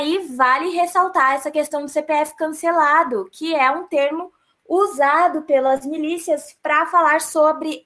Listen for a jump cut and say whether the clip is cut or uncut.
uncut